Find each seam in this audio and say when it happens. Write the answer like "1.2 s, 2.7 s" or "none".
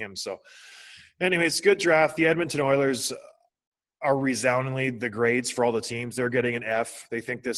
none